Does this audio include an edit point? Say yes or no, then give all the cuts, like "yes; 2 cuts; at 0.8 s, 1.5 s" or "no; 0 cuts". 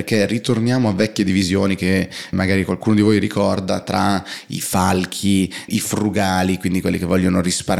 yes; 3 cuts; at 2.3 s, 5.7 s, 6.8 s